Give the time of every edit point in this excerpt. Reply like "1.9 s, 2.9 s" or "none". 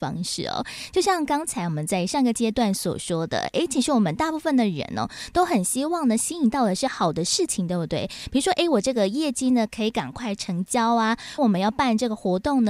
11.4 s